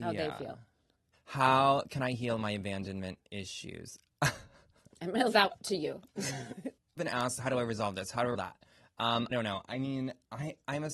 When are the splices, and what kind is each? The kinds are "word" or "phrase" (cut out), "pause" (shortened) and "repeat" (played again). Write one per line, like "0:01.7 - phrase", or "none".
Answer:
0:05.3 - word
0:07.0 - word
0:08.3 - word
0:09.3 - word